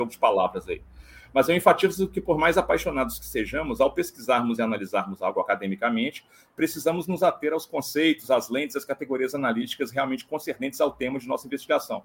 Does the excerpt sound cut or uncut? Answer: uncut